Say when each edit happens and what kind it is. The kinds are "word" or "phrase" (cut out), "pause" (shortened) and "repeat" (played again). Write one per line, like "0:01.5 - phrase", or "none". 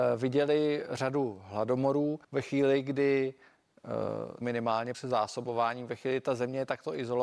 0:02.2 - pause
0:04.4 - word
0:04.9 - word